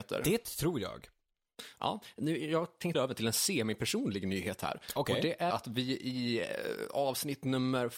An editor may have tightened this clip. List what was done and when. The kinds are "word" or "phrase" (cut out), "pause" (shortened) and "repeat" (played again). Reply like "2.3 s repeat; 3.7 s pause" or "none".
2.9 s word; 5.5 s word